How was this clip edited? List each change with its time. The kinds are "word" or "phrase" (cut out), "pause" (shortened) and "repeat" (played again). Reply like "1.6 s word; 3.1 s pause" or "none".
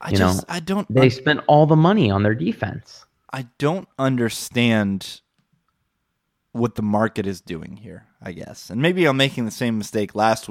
none